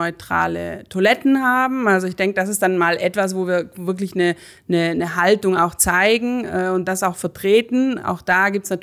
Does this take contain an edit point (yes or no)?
no